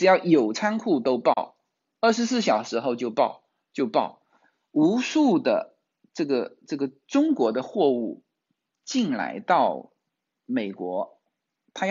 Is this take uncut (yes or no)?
yes